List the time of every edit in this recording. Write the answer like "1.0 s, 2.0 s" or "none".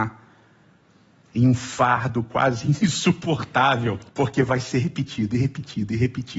4.1 s